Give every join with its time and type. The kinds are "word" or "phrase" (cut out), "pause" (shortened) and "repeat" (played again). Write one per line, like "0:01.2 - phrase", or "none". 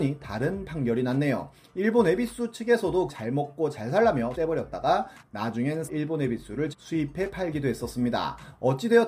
0:03.1 - word
0:04.3 - word
0:05.9 - word
0:06.7 - word